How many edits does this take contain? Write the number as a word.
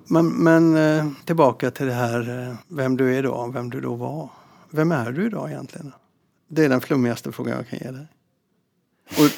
two